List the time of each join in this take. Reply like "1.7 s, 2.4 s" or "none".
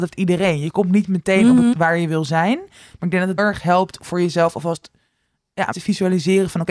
1.7 s, 3.4 s, 4.0 s, 5.7 s